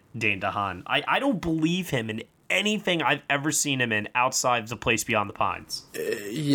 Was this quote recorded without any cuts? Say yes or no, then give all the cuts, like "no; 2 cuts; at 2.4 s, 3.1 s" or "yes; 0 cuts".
yes; 0 cuts